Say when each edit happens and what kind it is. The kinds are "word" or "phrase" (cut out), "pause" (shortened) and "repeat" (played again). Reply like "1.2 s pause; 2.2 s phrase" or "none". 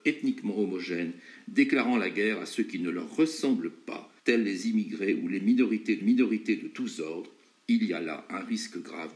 4.2 s pause; 6.0 s repeat

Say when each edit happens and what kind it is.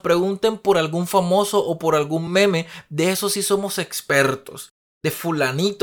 none

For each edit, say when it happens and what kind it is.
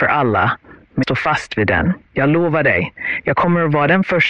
1.0 s word; 2.0 s pause

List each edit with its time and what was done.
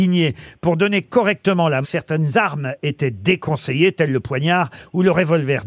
1.8 s word

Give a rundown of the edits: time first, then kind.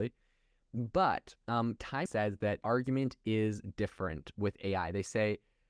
1.4 s pause; 2.1 s word; 2.6 s word

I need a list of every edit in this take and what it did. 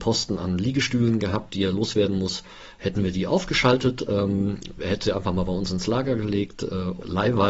none

